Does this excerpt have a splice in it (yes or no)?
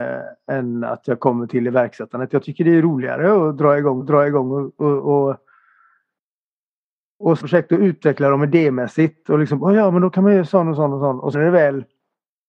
yes